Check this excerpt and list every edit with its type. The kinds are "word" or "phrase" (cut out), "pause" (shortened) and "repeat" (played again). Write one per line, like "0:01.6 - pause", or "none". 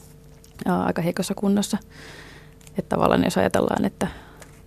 none